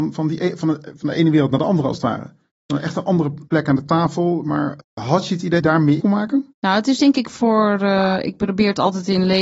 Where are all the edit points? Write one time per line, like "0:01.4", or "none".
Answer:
0:03.5
0:04.8
0:05.6
0:06.0
0:06.5